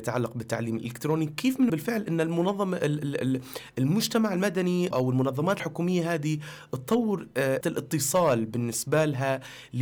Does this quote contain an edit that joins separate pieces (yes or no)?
yes